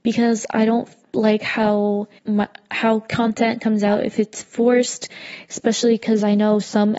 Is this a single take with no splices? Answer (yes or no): no